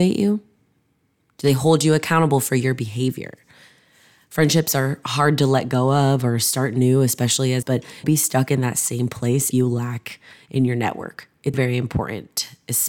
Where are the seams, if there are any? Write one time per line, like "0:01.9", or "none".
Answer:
0:07.6
0:08.0
0:09.5
0:11.5